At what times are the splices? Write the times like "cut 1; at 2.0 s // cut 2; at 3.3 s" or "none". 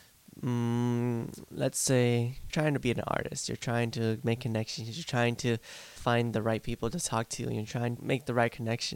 cut 1; at 2.5 s // cut 2; at 6.0 s // cut 3; at 8.0 s